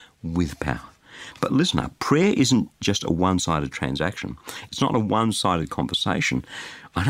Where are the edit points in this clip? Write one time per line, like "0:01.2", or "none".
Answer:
none